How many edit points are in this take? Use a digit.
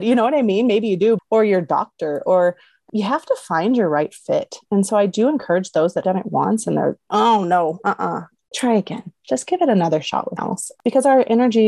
6